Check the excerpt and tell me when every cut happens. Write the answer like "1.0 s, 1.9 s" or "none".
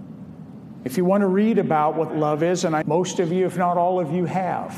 2.1 s, 2.8 s

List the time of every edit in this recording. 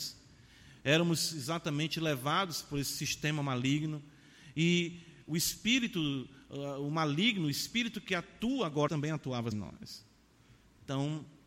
8.9 s, 9.5 s

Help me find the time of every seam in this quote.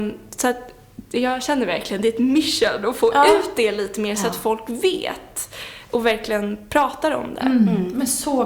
none

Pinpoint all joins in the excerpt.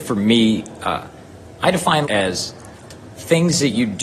2.0 s

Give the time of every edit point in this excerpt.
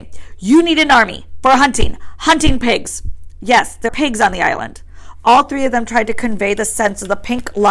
3.9 s

